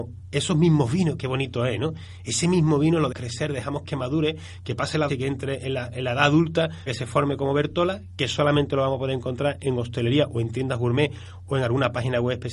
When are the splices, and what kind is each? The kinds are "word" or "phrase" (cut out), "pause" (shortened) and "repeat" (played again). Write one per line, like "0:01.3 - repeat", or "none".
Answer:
0:03.1 - word
0:05.1 - word
0:06.9 - word